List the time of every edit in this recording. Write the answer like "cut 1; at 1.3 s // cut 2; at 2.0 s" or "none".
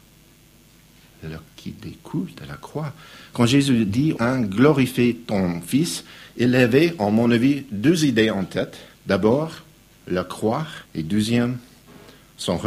cut 1; at 1.5 s // cut 2; at 4.2 s // cut 3; at 8.9 s // cut 4; at 10.9 s